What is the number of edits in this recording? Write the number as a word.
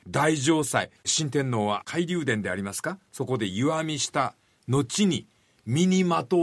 one